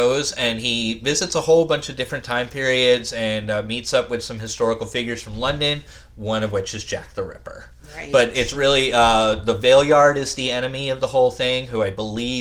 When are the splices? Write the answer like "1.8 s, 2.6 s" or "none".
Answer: none